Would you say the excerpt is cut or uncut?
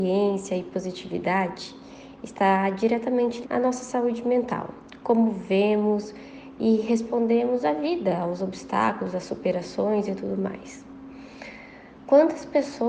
cut